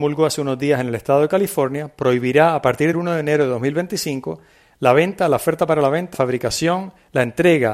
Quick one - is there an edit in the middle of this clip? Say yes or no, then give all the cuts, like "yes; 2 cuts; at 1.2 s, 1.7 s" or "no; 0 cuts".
yes; 2 cuts; at 2.9 s, 6.1 s